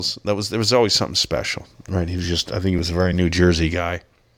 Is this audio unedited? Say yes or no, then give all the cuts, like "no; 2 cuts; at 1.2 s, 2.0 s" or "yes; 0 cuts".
yes; 0 cuts